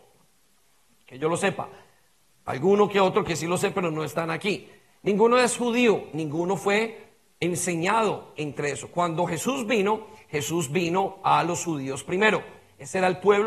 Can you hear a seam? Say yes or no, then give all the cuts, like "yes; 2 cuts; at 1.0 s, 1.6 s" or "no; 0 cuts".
no; 0 cuts